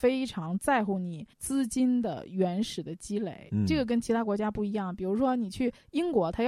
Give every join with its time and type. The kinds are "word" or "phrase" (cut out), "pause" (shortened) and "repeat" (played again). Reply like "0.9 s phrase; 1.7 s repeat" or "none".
1.3 s pause